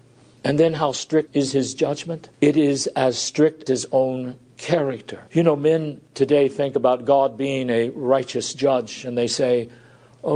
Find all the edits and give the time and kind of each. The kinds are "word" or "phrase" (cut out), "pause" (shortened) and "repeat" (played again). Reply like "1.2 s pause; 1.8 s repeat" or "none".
1.3 s word; 2.3 s pause; 3.7 s word; 5.3 s pause